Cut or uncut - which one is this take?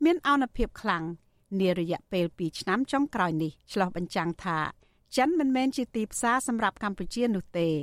cut